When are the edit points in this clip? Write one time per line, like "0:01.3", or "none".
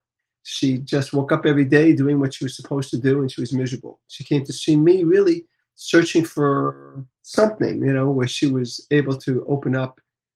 0:07.1

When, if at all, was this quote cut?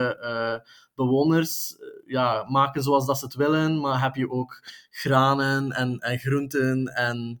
0:06.0

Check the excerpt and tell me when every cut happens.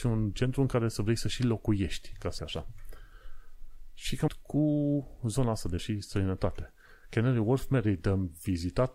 0:02.4
0:04.3
0:05.8

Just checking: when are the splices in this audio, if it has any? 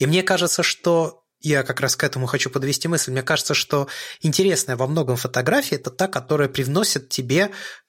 0:01.3

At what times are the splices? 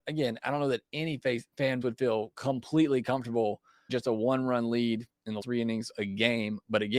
0:01.8
0:03.9
0:05.4
0:05.9

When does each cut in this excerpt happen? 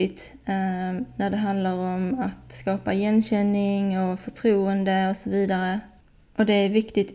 none

